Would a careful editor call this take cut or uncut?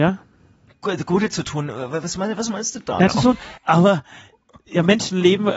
cut